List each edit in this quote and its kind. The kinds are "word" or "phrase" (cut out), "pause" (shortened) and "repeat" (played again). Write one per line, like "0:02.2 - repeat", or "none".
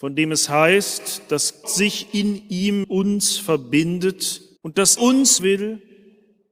0:01.6 - word
0:02.8 - word
0:04.6 - pause
0:05.0 - word
0:05.4 - phrase